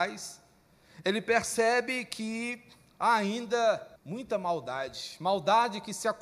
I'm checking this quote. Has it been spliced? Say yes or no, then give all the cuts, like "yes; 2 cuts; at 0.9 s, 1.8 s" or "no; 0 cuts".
yes; 1 cut; at 4.0 s